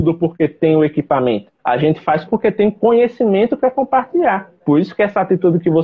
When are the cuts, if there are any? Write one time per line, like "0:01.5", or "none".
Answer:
0:01.6
0:02.3
0:04.6